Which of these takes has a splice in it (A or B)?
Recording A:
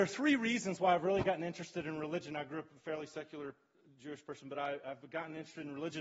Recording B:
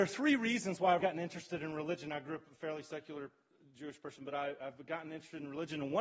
B